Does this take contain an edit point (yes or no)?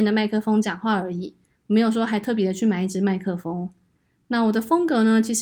no